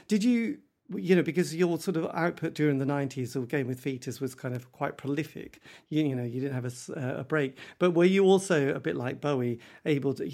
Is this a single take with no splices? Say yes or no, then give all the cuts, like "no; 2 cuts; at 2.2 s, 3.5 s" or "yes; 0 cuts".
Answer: yes; 0 cuts